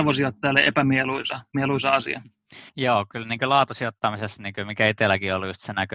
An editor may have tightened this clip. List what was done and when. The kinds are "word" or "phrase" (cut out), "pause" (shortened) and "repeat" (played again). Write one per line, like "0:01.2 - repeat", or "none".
0:02.7 - pause